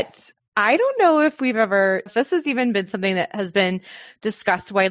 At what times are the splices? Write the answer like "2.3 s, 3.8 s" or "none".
2.1 s